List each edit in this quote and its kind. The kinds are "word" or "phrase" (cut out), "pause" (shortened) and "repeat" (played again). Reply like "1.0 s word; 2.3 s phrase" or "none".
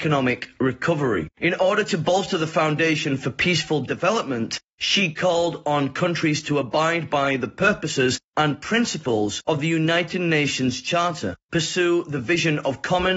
1.3 s pause